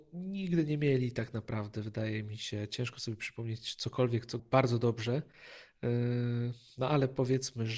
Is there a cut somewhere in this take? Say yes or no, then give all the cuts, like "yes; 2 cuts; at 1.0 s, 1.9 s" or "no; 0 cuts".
yes; 1 cut; at 4.4 s